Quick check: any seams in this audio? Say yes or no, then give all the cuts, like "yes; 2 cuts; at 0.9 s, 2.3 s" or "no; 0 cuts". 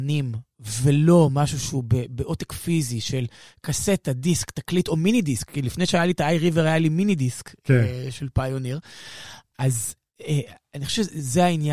no; 0 cuts